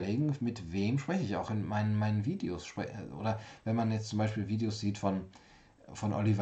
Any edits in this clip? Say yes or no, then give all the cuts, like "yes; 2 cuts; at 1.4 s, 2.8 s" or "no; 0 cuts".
no; 0 cuts